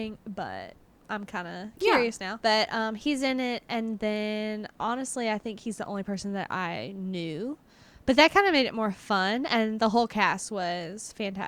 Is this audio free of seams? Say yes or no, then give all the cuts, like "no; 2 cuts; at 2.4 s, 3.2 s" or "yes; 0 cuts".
yes; 0 cuts